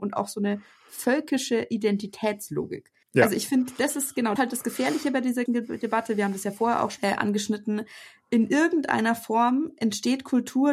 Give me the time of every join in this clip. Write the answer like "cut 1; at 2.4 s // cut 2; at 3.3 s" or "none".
cut 1; at 3.0 s // cut 2; at 4.4 s // cut 3; at 5.5 s // cut 4; at 7.0 s